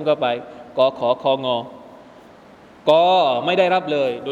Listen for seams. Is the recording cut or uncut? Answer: uncut